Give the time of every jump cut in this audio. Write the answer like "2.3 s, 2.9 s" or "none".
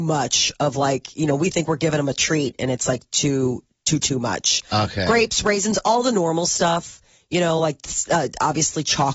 none